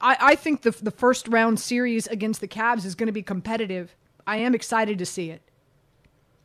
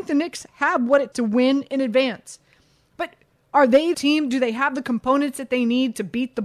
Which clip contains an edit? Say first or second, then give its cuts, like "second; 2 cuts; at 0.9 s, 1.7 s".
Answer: second; 2 cuts; at 1.1 s, 3.9 s